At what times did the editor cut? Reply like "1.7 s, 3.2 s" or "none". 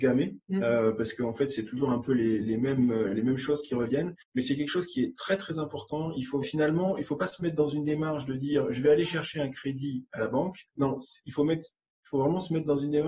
4.2 s, 6.4 s, 10.7 s